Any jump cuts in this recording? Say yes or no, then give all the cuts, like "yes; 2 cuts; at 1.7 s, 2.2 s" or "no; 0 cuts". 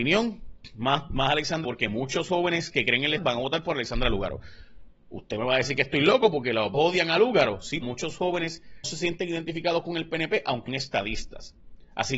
yes; 6 cuts; at 1.6 s, 3.2 s, 6.7 s, 7.8 s, 8.8 s, 10.7 s